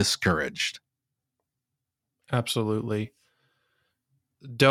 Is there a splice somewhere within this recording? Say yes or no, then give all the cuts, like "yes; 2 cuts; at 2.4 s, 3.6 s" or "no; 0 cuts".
no; 0 cuts